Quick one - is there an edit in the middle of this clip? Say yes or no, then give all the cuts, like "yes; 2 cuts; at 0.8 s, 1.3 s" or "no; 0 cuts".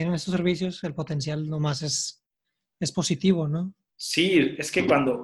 no; 0 cuts